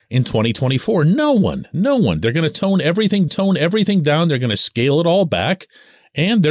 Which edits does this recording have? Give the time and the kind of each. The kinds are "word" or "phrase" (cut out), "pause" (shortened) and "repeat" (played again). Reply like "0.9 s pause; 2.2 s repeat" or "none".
3.3 s repeat

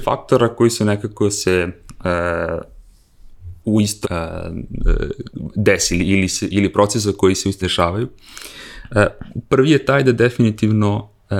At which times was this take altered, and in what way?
3.6 s pause; 4.0 s word; 7.6 s word

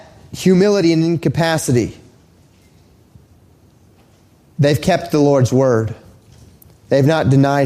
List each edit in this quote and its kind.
none

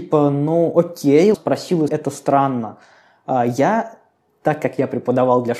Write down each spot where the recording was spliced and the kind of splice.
1.3 s word; 1.9 s word

